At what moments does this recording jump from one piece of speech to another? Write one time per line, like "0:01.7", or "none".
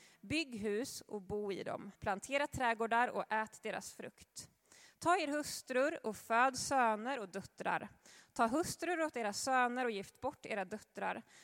0:02.0